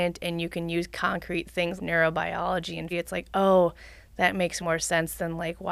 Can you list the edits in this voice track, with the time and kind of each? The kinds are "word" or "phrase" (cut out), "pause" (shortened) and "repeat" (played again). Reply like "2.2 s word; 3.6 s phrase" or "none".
1.8 s word; 2.9 s word; 4.6 s word